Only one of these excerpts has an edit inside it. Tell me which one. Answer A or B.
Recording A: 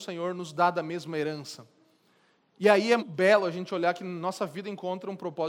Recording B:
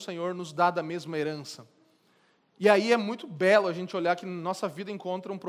A